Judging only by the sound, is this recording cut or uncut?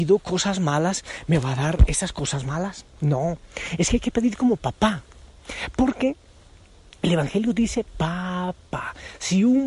uncut